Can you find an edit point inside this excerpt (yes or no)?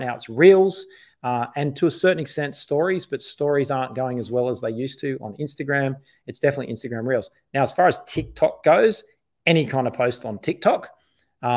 no